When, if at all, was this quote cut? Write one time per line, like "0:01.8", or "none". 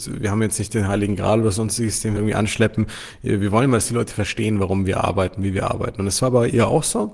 0:02.2